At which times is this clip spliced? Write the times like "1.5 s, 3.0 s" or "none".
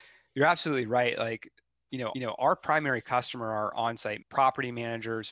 2.1 s, 4.2 s